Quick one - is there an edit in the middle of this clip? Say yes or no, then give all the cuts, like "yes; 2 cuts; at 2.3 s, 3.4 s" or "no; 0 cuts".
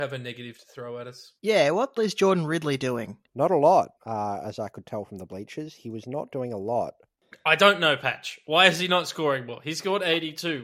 yes; 4 cuts; at 1.4 s, 2.0 s, 3.3 s, 4.0 s